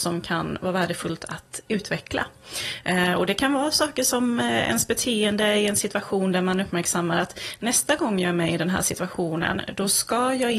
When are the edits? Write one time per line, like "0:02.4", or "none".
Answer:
none